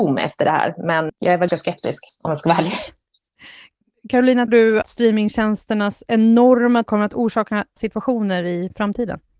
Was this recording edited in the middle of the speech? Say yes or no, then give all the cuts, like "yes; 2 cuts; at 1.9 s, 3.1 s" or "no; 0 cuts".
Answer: yes; 6 cuts; at 1.1 s, 1.5 s, 4.5 s, 4.8 s, 6.9 s, 7.8 s